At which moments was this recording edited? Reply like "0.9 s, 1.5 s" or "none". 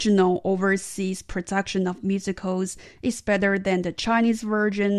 none